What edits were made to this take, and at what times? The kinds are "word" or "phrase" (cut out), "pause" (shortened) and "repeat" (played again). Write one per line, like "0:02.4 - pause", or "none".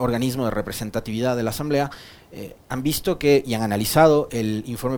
none